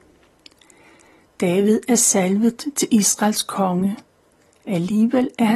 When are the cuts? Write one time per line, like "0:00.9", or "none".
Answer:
none